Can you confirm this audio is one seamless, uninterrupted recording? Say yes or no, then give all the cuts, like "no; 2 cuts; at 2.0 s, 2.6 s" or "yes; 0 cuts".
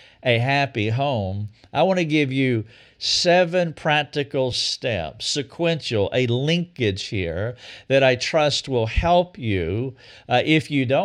yes; 0 cuts